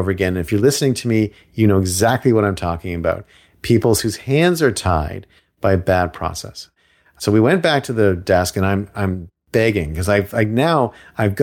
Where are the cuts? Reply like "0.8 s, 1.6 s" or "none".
none